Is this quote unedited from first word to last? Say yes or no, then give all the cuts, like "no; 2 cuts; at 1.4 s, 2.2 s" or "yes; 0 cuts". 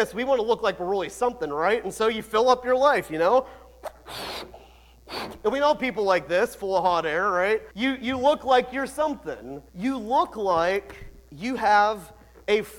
no; 2 cuts; at 7.7 s, 9.7 s